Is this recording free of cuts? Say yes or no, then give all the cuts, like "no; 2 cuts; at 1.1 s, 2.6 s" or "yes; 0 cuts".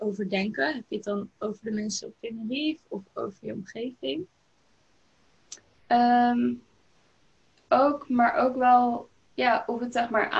yes; 0 cuts